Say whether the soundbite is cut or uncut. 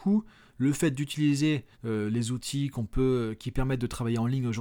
cut